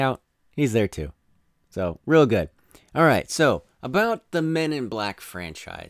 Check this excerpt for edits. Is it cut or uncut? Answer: uncut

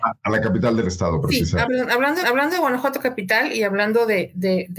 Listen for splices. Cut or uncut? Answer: cut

